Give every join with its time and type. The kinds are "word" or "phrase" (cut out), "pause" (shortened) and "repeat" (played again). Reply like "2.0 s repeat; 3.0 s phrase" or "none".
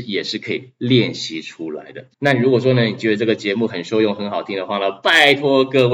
2.1 s pause